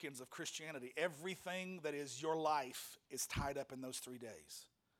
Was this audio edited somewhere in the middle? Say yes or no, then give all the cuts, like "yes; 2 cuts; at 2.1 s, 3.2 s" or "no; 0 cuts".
no; 0 cuts